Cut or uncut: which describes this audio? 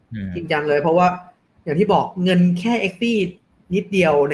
uncut